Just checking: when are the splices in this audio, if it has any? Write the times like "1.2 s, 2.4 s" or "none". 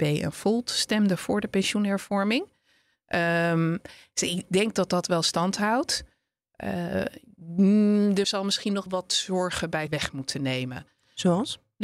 4.5 s, 8.2 s, 8.9 s, 9.9 s